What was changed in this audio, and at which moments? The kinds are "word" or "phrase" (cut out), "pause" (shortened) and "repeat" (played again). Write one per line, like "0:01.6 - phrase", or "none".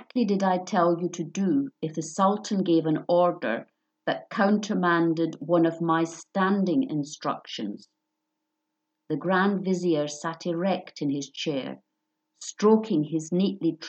none